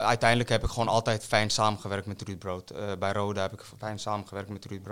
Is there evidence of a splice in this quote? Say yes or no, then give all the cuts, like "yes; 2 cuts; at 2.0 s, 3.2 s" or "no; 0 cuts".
no; 0 cuts